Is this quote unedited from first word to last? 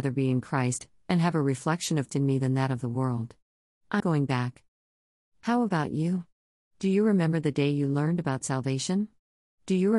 no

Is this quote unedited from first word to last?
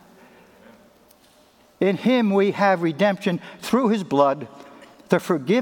yes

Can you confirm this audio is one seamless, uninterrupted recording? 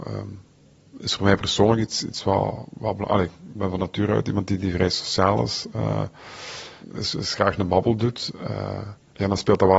yes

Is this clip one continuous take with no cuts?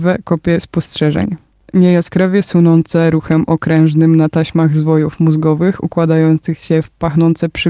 yes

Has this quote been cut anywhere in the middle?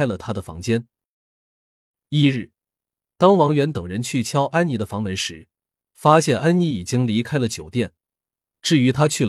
no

